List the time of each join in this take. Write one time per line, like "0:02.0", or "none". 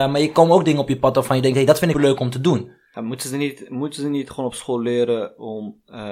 0:01.9